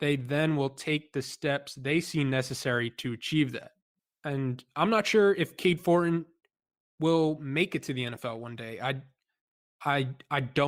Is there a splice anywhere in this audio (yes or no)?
no